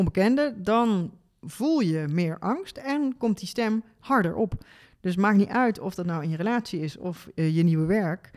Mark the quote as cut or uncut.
uncut